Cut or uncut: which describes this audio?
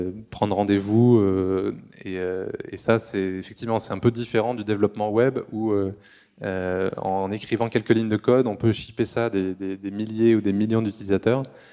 uncut